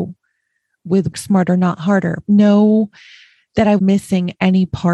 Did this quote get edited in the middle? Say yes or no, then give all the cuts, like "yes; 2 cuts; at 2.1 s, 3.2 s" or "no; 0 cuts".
yes; 3 cuts; at 1.1 s, 2.3 s, 3.8 s